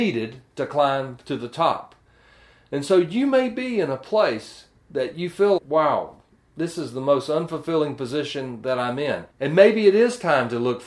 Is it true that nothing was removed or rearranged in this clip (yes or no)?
no